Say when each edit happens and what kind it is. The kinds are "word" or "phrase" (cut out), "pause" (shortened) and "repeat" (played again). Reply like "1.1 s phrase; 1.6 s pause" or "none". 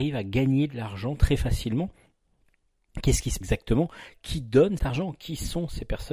3.4 s word; 4.8 s word